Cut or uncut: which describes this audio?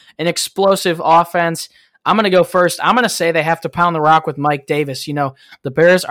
uncut